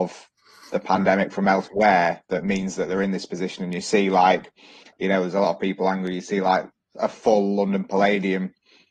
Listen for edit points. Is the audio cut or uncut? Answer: uncut